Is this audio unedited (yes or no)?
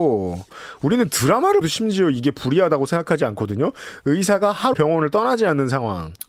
no